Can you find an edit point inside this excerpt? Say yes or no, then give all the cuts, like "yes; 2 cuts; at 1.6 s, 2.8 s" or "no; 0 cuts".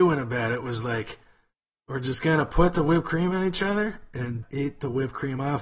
yes; 1 cut; at 4.4 s